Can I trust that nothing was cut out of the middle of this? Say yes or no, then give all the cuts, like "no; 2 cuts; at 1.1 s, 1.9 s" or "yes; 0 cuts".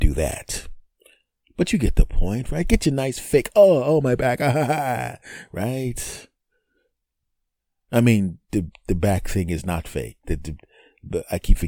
no; 1 cut; at 8.4 s